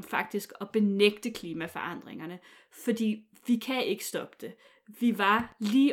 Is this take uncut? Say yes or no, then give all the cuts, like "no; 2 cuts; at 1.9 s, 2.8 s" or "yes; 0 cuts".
yes; 0 cuts